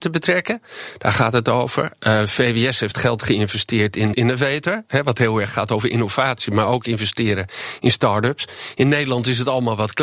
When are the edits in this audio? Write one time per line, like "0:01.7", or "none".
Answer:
0:04.1